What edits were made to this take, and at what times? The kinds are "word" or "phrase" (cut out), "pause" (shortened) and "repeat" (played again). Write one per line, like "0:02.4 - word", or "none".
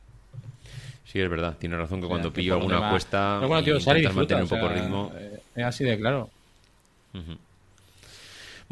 none